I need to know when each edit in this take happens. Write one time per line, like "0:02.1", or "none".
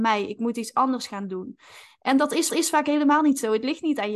0:02.5

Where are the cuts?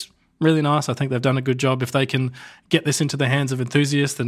none

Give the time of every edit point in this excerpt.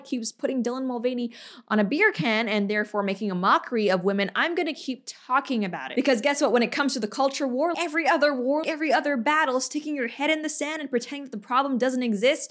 0:07.7
0:08.6

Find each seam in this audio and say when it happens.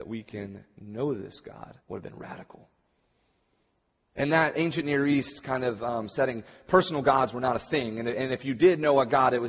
0:01.8

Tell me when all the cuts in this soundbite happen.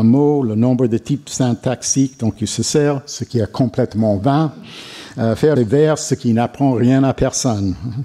0:05.6

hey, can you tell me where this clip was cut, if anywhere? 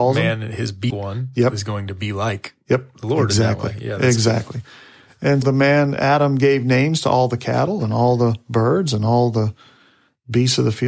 0:00.9
0:05.4

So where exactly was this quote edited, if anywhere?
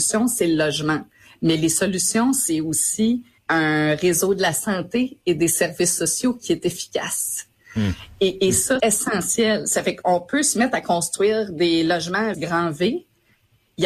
0:03.4
0:08.8
0:12.3

